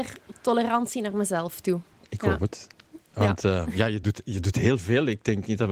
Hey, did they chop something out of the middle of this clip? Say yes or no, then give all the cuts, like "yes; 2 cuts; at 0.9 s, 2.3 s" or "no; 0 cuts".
no; 0 cuts